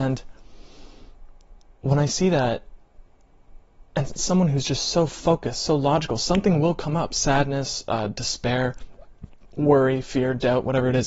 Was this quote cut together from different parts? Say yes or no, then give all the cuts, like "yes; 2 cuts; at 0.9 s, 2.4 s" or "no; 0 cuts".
no; 0 cuts